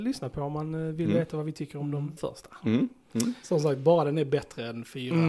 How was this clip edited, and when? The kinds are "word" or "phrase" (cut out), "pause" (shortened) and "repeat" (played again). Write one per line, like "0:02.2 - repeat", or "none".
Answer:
0:02.2 - word